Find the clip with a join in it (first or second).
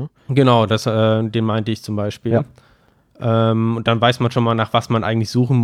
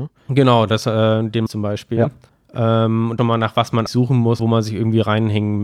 second